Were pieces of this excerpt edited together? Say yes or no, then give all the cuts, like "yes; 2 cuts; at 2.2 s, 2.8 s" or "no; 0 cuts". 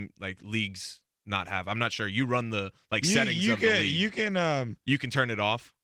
no; 0 cuts